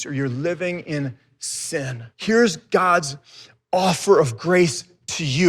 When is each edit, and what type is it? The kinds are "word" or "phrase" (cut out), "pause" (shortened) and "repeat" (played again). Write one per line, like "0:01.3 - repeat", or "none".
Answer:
0:02.1 - pause